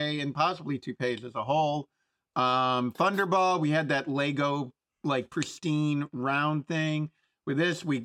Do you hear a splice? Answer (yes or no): no